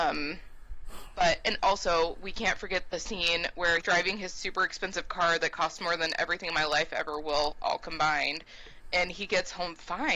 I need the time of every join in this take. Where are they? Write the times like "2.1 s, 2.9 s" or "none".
3.8 s